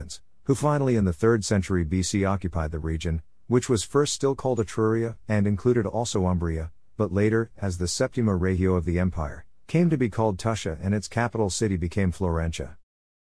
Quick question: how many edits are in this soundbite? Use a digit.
0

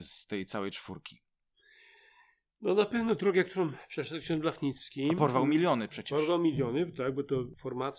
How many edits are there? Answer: 0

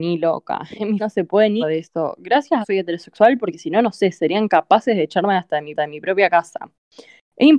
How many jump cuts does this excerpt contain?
4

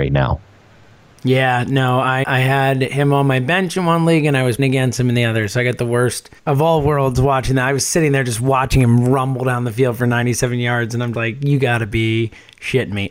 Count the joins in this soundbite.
4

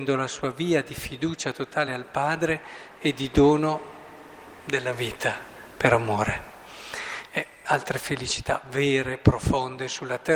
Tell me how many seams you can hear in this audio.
0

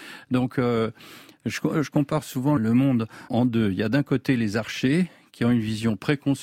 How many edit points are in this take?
2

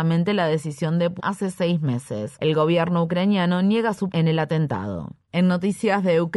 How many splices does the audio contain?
2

